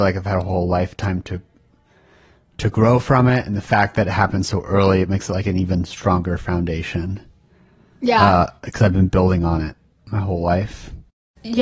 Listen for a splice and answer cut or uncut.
uncut